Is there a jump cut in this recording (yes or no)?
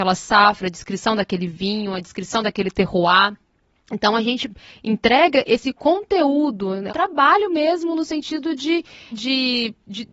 yes